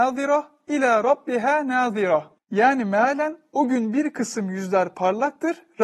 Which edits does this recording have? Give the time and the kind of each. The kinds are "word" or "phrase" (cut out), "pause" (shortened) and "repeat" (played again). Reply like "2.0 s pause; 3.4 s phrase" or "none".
none

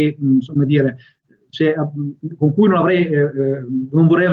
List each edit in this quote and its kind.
none

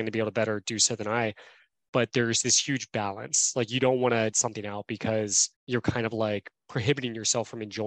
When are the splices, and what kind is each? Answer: 4.3 s phrase; 5.6 s pause

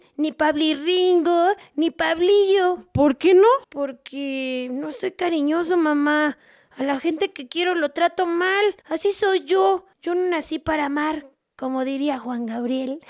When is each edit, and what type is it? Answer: 3.6 s pause; 8.8 s pause; 9.9 s pause

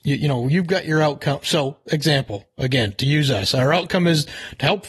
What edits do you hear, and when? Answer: none

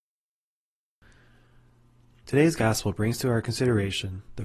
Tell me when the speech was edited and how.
none

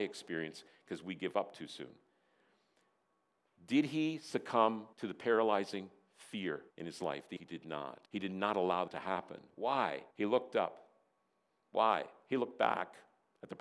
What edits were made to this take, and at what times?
4.9 s pause; 6.7 s pause; 7.4 s phrase; 8.0 s pause; 8.9 s word; 10.1 s pause

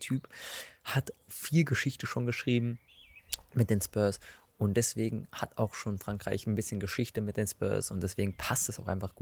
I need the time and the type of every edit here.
none

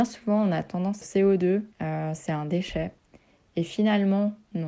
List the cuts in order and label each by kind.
1.0 s phrase; 1.7 s pause

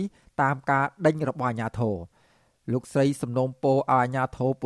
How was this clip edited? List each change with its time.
none

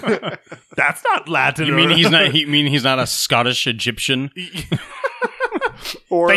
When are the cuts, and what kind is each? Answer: none

